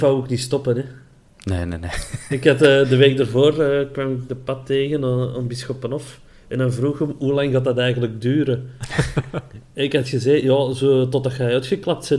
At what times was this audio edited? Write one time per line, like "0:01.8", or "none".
none